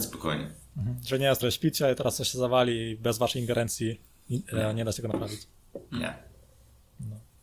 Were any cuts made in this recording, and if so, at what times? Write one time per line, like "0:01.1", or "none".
0:01.4